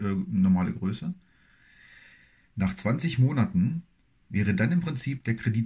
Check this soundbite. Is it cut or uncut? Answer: uncut